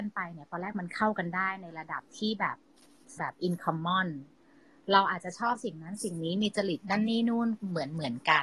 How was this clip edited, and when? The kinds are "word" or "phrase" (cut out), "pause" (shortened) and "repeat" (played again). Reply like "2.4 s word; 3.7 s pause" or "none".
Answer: 3.2 s word